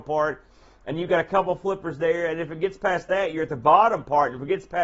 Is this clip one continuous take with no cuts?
yes; 0 cuts

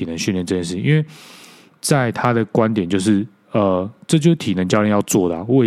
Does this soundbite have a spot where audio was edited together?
no; 0 cuts

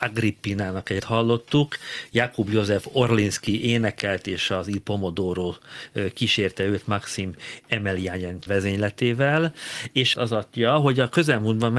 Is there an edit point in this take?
yes; 3 cuts; at 1.0 s, 8.5 s, 10.1 s

